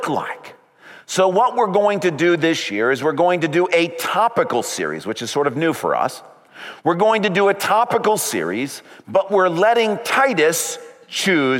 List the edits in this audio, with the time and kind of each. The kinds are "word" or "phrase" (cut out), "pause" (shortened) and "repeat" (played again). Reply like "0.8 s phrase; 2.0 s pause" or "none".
none